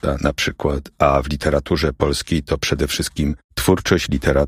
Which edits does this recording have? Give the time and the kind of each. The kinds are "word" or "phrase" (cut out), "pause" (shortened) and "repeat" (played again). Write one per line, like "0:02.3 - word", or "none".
none